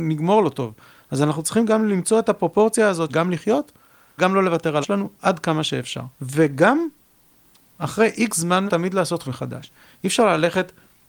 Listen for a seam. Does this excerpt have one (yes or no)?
yes